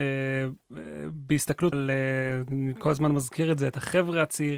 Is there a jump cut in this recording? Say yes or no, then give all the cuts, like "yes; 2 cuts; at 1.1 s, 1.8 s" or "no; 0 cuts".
yes; 1 cut; at 1.7 s